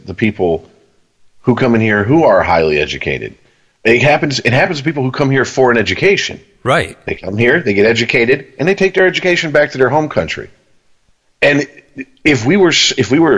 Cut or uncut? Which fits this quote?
uncut